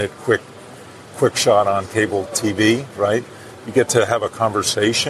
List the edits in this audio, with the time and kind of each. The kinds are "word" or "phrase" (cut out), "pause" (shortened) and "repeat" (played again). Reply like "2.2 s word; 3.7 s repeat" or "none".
none